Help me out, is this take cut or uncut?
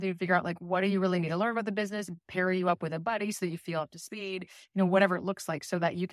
uncut